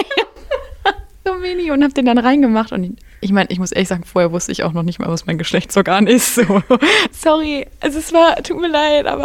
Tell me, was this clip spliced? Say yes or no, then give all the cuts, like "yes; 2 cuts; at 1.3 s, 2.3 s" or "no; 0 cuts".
no; 0 cuts